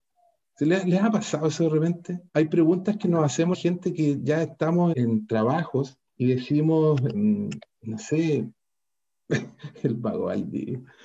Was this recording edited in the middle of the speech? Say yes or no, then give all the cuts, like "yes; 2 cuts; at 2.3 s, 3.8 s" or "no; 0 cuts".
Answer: yes; 5 cuts; at 2.3 s, 3.5 s, 4.9 s, 6.1 s, 7.1 s